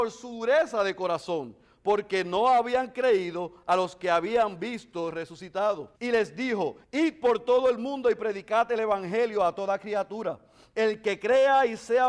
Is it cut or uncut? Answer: cut